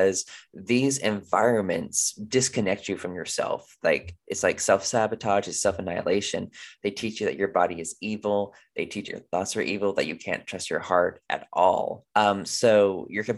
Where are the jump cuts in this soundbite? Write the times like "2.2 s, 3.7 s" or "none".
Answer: 9.1 s, 12.1 s